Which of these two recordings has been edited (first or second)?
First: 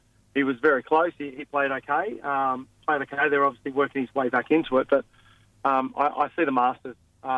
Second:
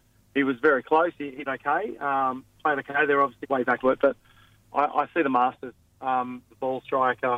second